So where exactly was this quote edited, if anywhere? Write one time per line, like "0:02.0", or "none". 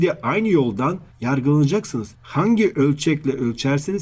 none